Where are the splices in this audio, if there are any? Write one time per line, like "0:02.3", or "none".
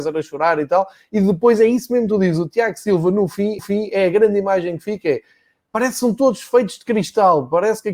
0:03.6